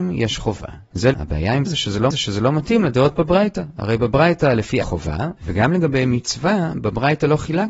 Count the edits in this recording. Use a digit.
4